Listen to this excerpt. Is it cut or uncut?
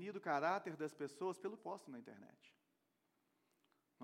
cut